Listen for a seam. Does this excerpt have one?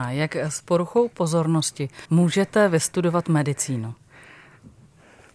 yes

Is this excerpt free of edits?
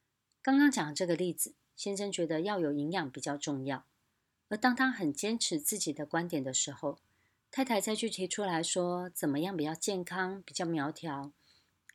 yes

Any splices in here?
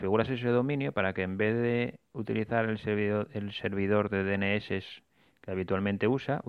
no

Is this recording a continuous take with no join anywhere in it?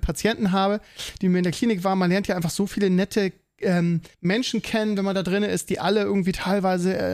no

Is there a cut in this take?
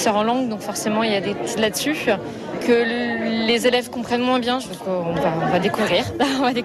yes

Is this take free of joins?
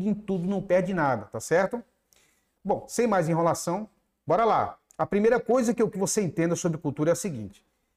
no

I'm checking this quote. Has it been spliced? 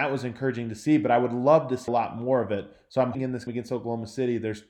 yes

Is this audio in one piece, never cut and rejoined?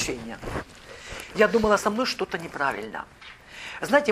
no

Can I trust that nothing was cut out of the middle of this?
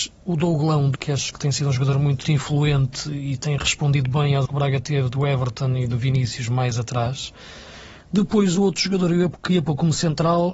no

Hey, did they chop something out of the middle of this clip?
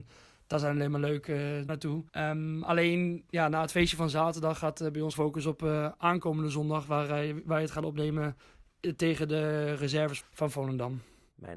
yes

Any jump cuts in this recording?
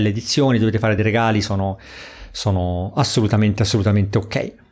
no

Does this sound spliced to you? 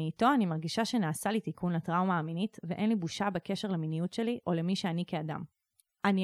no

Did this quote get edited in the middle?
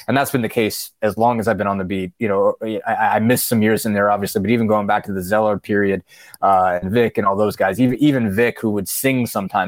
no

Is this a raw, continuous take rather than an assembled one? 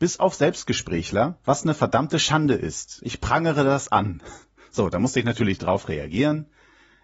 yes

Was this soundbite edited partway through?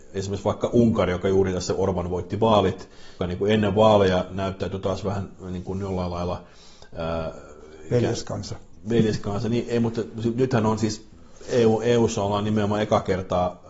yes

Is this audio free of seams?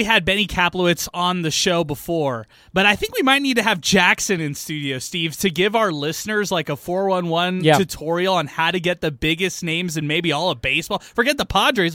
yes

